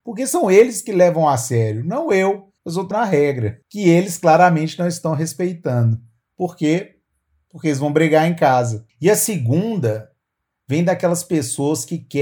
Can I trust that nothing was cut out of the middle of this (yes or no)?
no